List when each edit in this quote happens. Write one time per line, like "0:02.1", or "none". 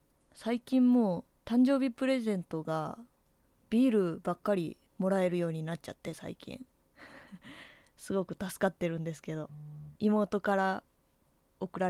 0:01.3
0:03.3
0:04.9
0:10.0